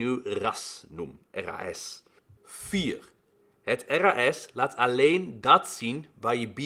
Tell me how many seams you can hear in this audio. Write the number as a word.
zero